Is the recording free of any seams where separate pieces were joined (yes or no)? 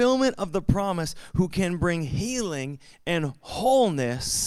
yes